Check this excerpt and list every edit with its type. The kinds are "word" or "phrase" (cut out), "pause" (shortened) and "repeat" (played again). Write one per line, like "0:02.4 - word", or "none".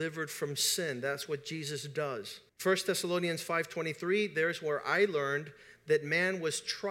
0:02.5 - pause